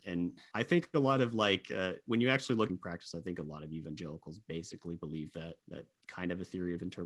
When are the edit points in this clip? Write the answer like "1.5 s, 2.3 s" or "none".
2.7 s, 5.6 s